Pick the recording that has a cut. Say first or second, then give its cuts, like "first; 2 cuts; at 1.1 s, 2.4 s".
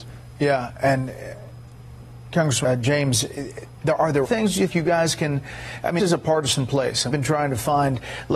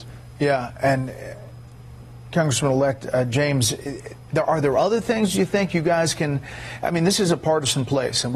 first; 5 cuts; at 2.6 s, 4.2 s, 4.7 s, 6.0 s, 7.1 s